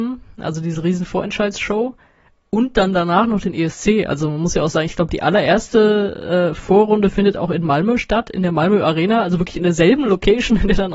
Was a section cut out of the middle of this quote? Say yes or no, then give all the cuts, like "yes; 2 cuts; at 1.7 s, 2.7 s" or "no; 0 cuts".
no; 0 cuts